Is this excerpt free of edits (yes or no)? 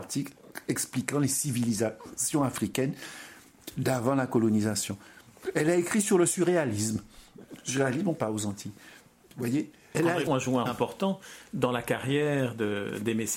no